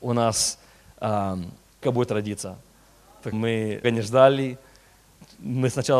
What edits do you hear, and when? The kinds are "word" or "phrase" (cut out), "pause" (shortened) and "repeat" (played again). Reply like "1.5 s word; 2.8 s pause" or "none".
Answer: 1.8 s word; 3.3 s word; 3.8 s word